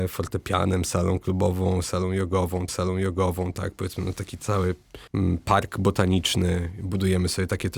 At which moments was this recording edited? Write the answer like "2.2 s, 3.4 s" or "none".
2.7 s, 5.1 s